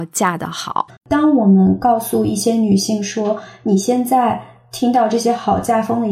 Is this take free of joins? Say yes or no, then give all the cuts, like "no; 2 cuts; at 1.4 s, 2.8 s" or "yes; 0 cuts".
no; 1 cut; at 1.0 s